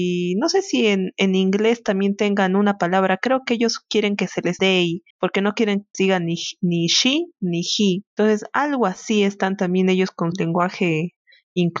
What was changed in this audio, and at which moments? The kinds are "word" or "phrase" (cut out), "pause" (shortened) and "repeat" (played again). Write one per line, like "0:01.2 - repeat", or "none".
0:04.6 - word
0:05.1 - pause
0:05.9 - phrase
0:08.1 - pause
0:10.3 - word